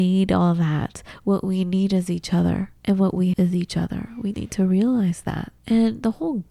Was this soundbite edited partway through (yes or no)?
yes